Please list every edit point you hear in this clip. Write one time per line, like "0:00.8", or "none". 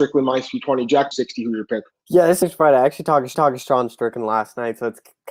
0:01.1
0:01.9
0:02.4
0:03.3

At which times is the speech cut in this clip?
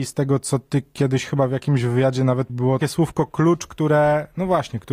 0:02.5
0:02.8

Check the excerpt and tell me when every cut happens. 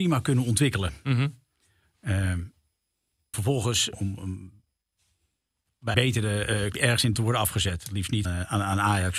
0:03.3
0:03.9
0:05.9
0:06.7
0:07.1
0:08.2

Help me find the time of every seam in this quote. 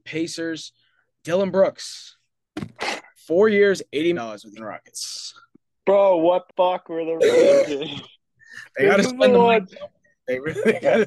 0:03.2
0:04.1
0:04.6
0:06.5
0:07.2

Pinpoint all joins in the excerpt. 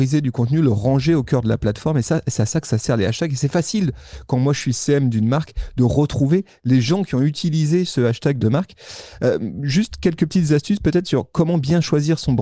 0:08.4

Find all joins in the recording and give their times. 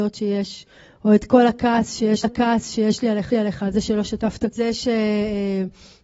0:02.2
0:03.3
0:04.5

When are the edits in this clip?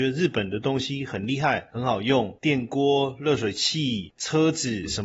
none

